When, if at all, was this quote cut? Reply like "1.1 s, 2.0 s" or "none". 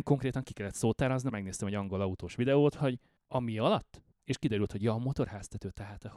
1.3 s, 3.2 s, 4.1 s